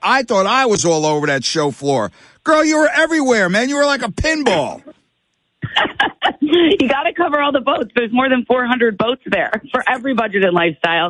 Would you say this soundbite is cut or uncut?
uncut